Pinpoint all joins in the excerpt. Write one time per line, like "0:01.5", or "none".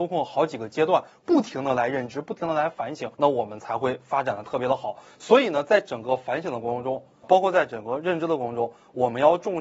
0:03.1
0:07.2